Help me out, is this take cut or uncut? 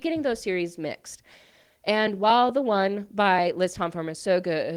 uncut